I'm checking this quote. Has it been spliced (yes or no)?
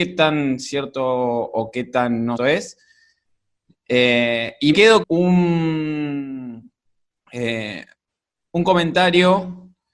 yes